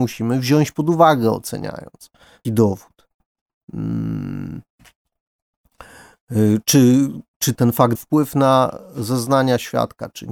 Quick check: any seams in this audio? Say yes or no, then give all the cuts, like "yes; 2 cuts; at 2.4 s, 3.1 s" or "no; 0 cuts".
yes; 3 cuts; at 2.4 s, 7.5 s, 8.0 s